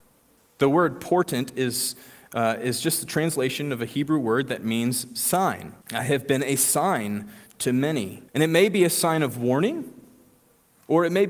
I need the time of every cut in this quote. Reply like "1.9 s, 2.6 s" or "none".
5.8 s, 8.3 s